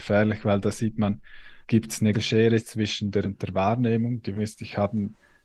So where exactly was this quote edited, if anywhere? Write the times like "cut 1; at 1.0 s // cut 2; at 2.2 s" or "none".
cut 1; at 1.6 s // cut 2; at 2.1 s // cut 3; at 3.2 s // cut 4; at 4.4 s